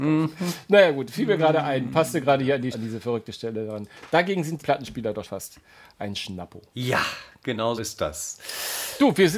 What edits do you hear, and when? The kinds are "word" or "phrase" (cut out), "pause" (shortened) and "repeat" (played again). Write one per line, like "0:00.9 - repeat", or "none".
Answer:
0:02.7 - word
0:04.6 - word
0:05.2 - word
0:06.7 - pause
0:07.8 - word